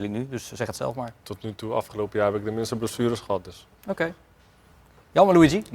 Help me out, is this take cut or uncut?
uncut